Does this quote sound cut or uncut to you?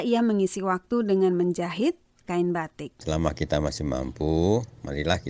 cut